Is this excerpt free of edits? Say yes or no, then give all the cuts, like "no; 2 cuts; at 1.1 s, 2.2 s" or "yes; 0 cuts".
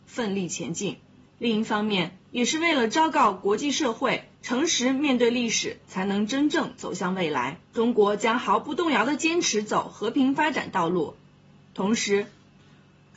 no; 5 cuts; at 1.2 s, 2.2 s, 4.3 s, 5.8 s, 7.7 s